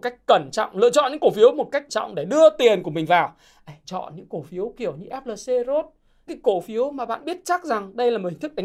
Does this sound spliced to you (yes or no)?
yes